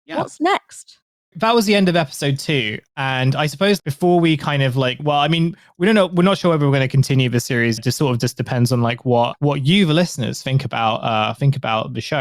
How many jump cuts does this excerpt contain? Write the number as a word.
five